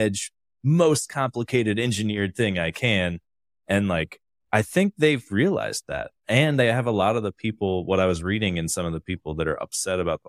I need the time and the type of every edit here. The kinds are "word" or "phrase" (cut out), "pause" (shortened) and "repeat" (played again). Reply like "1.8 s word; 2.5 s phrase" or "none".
none